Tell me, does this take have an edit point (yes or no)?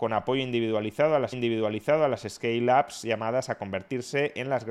yes